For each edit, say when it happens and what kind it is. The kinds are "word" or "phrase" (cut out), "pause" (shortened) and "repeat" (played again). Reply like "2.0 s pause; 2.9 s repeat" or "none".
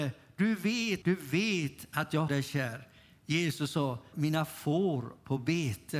1.0 s word; 2.3 s word; 4.1 s word